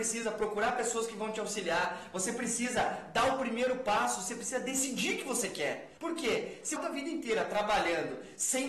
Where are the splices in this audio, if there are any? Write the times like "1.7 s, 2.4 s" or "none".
6.0 s, 6.8 s